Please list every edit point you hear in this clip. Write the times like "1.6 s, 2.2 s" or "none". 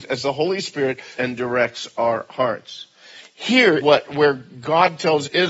1.1 s, 3.8 s